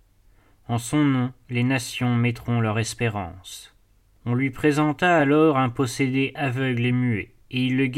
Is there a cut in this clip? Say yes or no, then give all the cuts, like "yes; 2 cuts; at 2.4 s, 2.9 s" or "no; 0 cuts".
no; 0 cuts